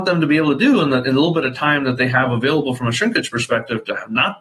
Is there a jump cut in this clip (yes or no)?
no